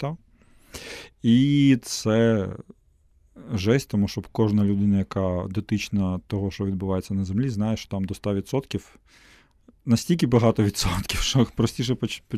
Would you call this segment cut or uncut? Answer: uncut